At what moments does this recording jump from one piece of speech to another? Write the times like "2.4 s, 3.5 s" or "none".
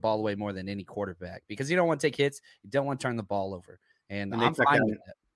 none